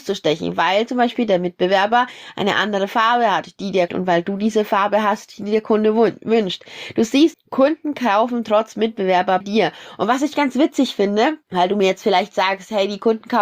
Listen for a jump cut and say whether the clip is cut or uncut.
cut